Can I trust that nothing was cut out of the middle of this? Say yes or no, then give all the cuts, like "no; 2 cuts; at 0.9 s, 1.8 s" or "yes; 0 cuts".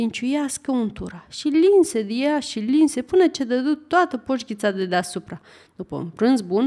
yes; 0 cuts